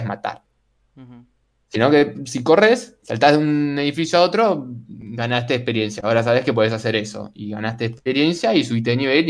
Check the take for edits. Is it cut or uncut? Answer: uncut